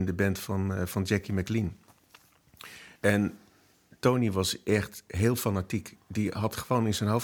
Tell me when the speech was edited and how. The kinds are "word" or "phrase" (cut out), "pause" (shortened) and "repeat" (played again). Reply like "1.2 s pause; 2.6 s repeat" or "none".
3.0 s pause

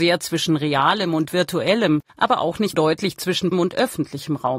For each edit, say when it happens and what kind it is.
2.1 s pause; 2.7 s word; 3.5 s word

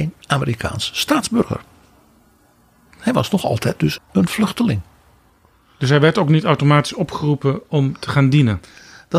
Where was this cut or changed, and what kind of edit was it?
4.0 s word

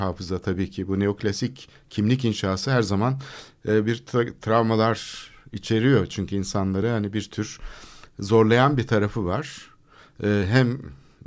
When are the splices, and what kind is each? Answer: none

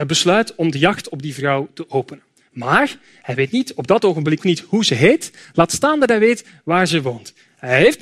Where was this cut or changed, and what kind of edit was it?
4.4 s word

